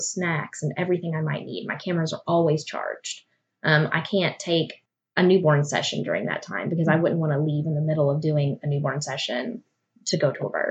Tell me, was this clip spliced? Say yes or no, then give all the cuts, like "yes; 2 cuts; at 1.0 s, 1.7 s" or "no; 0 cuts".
no; 0 cuts